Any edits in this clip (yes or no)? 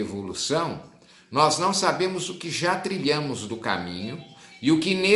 no